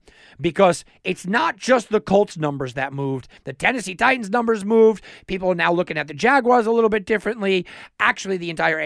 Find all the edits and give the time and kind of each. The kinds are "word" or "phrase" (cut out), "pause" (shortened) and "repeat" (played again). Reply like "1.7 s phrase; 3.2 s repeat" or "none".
3.4 s pause

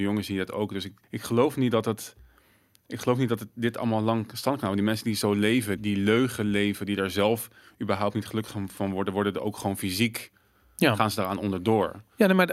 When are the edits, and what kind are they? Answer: 1.0 s pause; 5.8 s word

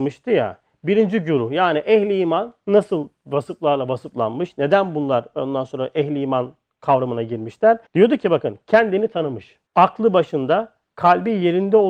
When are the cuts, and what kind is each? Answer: 7.9 s pause; 9.7 s pause

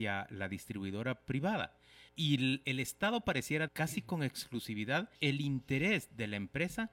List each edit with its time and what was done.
2.1 s pause; 3.7 s word; 5.2 s pause

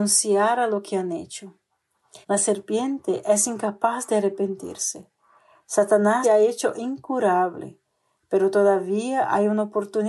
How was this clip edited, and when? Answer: 2.2 s pause; 6.2 s word

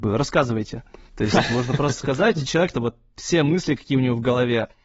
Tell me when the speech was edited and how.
1.1 s pause; 2.7 s phrase

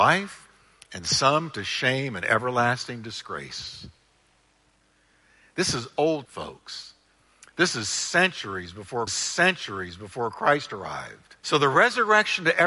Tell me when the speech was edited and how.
6.2 s word; 9.1 s repeat; 11.4 s pause

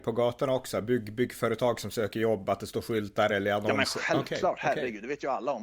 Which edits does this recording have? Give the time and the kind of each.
none

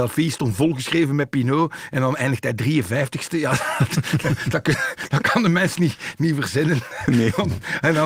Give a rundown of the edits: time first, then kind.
none

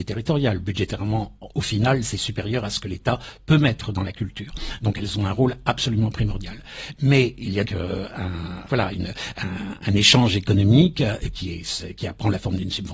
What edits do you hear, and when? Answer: 7.7 s word; 8.7 s word

